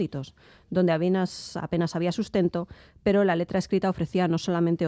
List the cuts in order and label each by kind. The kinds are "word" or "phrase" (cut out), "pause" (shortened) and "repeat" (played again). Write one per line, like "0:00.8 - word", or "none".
none